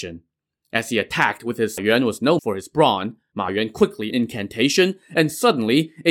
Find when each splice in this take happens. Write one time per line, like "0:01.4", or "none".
0:01.8
0:02.4
0:03.3
0:04.1